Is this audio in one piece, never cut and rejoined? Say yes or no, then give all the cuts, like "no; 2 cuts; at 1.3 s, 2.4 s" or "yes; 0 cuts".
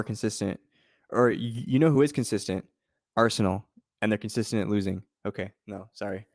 yes; 0 cuts